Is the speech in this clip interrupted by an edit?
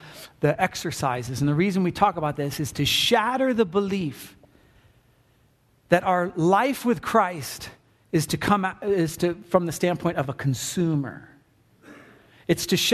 no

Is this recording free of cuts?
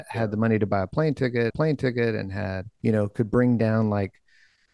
no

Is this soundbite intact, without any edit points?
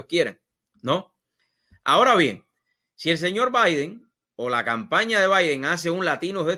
yes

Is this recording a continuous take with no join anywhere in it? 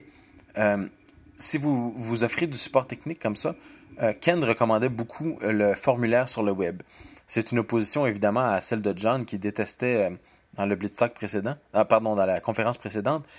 yes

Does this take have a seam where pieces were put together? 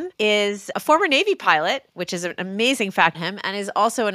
yes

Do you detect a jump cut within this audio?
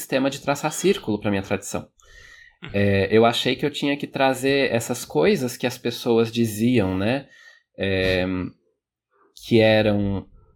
no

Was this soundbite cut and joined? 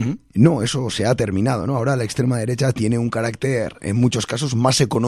no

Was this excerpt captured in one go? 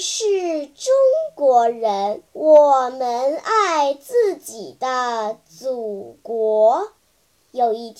no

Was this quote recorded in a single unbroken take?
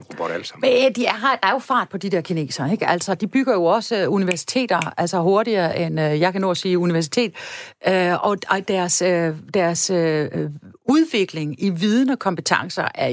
yes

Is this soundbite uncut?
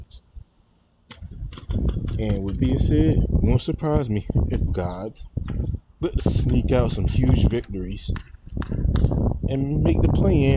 no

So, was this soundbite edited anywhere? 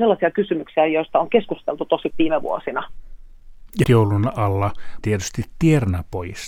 yes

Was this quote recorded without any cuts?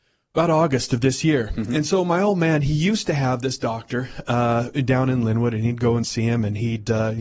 yes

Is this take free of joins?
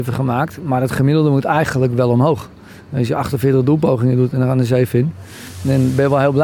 yes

